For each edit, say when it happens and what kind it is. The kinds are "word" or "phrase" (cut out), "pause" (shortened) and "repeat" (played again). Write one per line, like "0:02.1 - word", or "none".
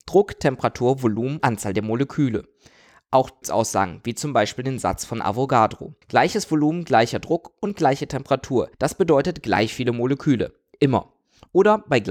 0:01.4 - word
0:03.4 - phrase
0:06.0 - pause
0:08.7 - pause

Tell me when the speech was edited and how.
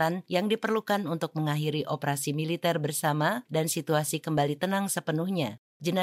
none

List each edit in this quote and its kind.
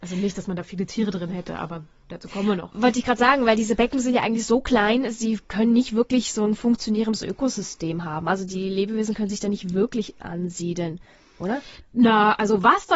none

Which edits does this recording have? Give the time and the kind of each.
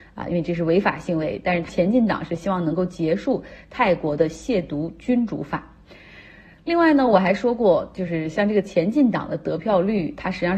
none

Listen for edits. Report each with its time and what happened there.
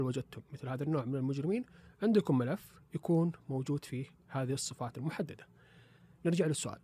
none

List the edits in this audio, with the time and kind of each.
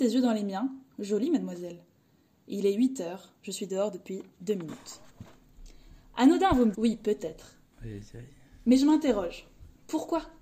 0:06.7 - word

